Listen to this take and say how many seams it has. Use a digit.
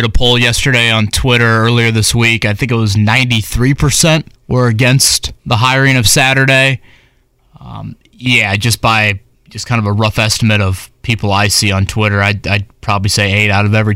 4